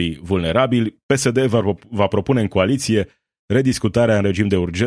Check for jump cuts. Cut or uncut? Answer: uncut